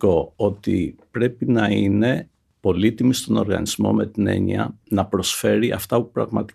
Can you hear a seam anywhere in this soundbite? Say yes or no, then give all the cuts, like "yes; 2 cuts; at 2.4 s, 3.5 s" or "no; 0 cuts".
no; 0 cuts